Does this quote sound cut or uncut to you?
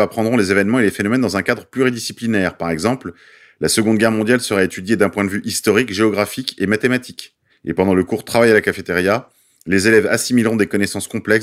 cut